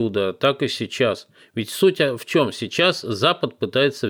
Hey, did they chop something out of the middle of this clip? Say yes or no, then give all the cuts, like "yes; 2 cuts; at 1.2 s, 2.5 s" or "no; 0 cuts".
no; 0 cuts